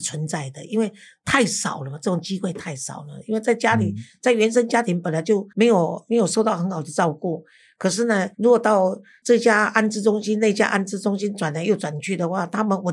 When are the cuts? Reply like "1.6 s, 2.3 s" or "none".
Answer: 5.5 s, 8.3 s